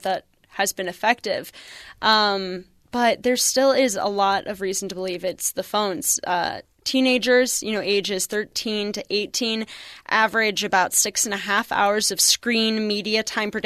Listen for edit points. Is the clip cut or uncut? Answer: uncut